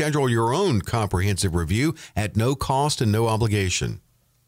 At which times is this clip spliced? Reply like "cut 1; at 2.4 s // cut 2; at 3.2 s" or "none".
none